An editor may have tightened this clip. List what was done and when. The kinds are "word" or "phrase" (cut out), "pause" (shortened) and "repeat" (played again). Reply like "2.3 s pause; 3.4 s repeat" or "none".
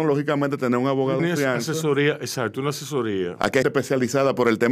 1.2 s word; 3.6 s word